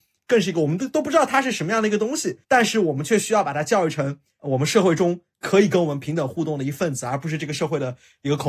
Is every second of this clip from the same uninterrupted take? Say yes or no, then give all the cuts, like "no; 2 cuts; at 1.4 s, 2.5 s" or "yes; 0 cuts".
no; 1 cut; at 2.4 s